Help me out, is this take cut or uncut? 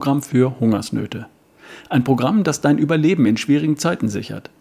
uncut